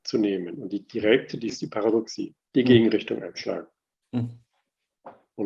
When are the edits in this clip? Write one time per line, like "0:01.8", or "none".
0:01.5
0:02.4